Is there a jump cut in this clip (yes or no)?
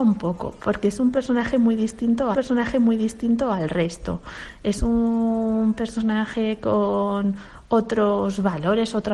yes